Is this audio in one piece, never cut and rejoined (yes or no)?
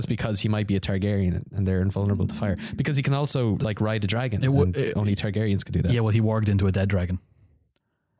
yes